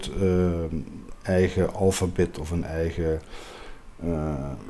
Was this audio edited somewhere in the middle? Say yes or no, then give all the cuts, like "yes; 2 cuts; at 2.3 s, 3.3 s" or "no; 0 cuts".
no; 0 cuts